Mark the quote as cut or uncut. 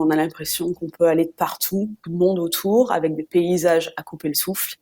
cut